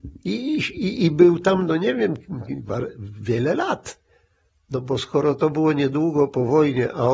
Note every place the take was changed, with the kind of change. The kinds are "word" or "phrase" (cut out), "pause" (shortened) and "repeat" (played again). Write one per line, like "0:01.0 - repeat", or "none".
none

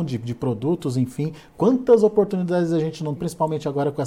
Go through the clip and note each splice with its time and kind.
0:03.2 - word

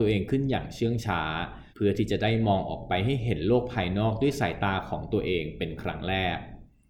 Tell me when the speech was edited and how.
0:01.7 - pause

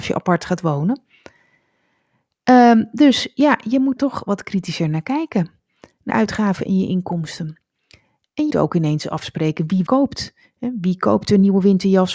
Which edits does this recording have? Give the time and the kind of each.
0:04.0 - word
0:06.1 - word
0:08.5 - word
0:09.9 - word

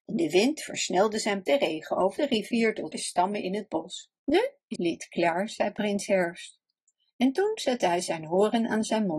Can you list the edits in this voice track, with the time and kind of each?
0:01.5 - phrase
0:02.2 - phrase
0:02.9 - phrase
0:04.2 - pause
0:04.8 - word

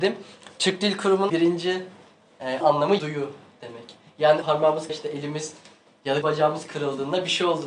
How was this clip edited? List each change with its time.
0:01.3 - word
0:02.6 - word
0:03.0 - word
0:04.4 - word
0:04.9 - word
0:06.2 - word

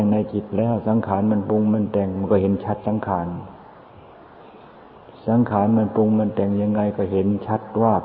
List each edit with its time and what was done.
none

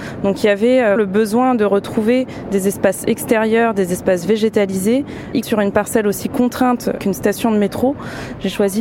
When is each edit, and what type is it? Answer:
0:01.0 - word
0:05.4 - word

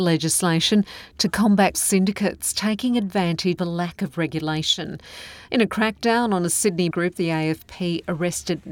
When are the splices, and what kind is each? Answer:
0:01.7 - word
0:03.6 - word
0:06.9 - word

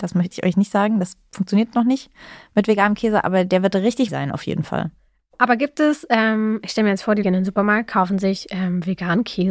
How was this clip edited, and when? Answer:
0:04.1 - word
0:07.2 - word

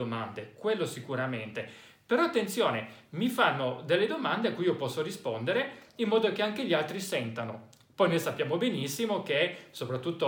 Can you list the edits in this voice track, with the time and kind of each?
none

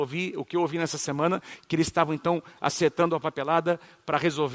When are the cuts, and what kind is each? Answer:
none

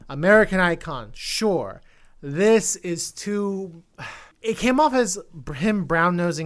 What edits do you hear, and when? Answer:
0:04.3 - pause

